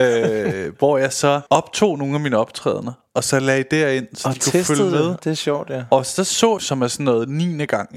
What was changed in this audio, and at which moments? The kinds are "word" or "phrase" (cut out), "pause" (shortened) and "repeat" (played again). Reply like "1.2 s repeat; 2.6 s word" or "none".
1.5 s pause; 5.2 s word; 6.6 s phrase